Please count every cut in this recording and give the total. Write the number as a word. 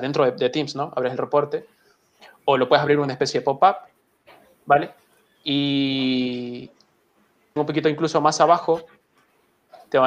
one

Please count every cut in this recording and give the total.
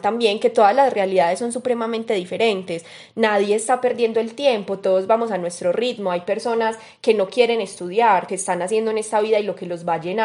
one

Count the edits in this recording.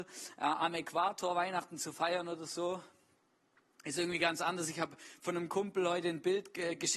zero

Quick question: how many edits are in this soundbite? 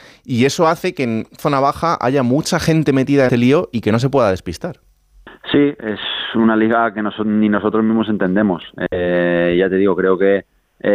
two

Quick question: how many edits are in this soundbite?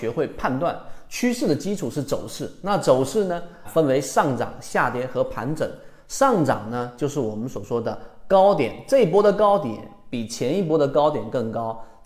one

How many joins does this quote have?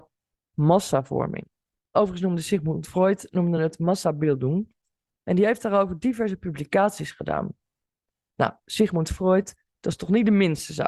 zero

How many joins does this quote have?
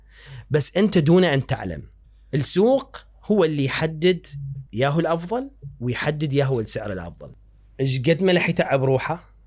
three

